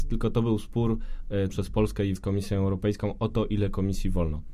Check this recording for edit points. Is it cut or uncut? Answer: cut